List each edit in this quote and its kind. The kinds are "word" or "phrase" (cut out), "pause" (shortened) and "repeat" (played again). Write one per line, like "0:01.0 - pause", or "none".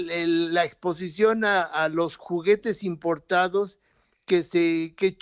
none